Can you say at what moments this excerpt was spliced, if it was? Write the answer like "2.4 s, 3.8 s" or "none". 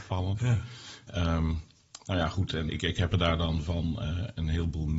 2.7 s

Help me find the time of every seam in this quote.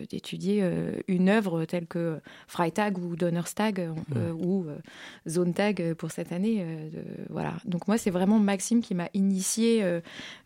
none

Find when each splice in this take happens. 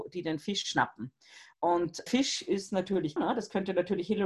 2.1 s, 3.2 s

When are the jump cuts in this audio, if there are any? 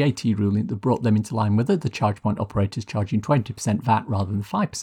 none

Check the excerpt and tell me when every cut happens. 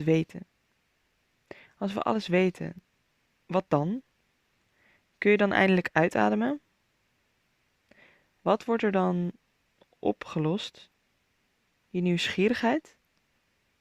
none

